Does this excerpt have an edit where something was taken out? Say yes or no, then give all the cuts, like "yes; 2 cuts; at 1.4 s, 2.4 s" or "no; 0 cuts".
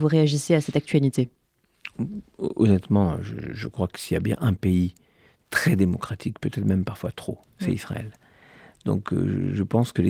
no; 0 cuts